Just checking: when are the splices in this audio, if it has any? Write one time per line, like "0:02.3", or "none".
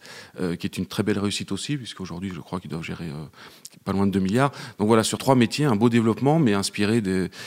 0:05.2